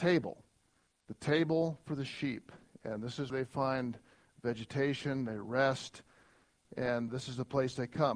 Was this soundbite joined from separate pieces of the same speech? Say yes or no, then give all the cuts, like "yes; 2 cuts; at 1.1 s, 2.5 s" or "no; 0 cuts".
yes; 2 cuts; at 3.3 s, 7.1 s